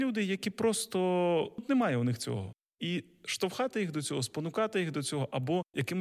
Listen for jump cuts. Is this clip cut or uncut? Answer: cut